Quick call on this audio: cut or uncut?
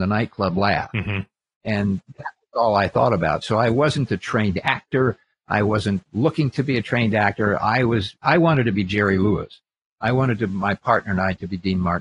uncut